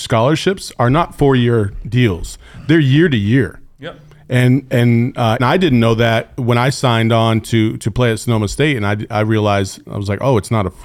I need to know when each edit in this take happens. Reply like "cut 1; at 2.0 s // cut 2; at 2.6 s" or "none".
cut 1; at 5.4 s